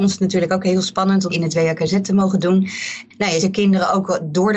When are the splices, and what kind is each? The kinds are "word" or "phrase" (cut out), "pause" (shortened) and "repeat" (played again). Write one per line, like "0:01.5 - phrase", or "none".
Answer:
0:01.3 - word
0:03.4 - word